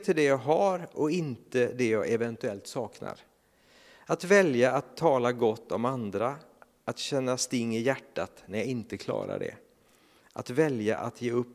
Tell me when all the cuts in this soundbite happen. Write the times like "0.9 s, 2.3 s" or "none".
none